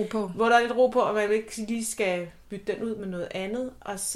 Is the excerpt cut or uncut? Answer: uncut